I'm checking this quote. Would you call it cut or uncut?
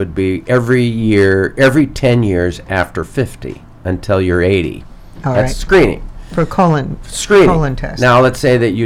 uncut